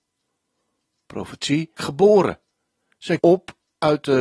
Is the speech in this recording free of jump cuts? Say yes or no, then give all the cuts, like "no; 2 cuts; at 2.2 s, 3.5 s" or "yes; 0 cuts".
no; 2 cuts; at 1.8 s, 3.2 s